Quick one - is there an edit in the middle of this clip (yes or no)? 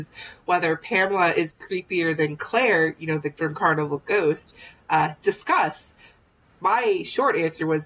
yes